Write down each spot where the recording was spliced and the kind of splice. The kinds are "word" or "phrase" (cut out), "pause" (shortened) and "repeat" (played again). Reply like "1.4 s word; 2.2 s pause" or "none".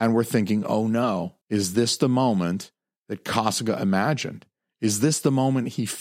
1.4 s pause